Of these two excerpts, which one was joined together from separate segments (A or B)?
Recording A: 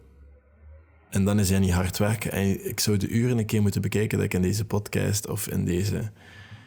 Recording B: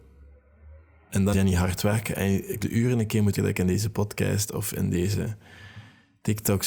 B